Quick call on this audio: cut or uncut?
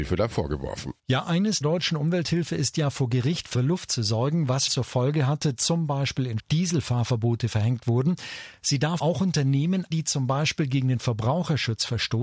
cut